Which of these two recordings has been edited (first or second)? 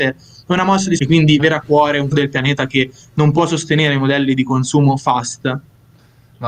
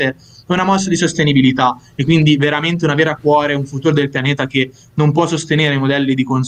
first